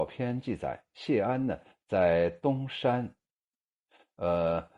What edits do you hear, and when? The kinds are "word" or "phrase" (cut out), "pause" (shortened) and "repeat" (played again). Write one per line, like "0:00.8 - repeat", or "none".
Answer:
none